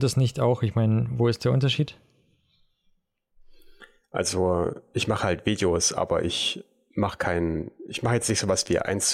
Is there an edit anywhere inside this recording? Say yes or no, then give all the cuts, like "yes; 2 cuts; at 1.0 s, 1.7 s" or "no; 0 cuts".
no; 0 cuts